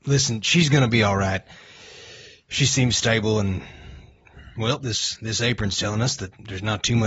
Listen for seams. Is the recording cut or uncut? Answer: uncut